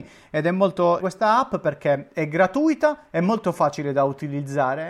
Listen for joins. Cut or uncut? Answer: cut